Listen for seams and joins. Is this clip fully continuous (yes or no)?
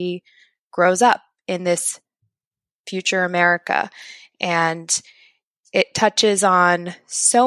yes